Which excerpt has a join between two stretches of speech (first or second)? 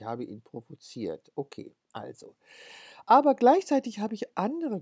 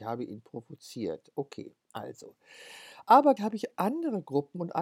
second